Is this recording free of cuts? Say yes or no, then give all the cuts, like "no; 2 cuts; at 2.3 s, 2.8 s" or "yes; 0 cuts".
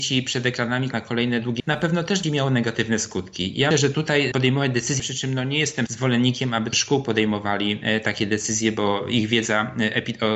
no; 8 cuts; at 0.9 s, 1.6 s, 2.2 s, 3.7 s, 4.3 s, 5.0 s, 5.9 s, 6.7 s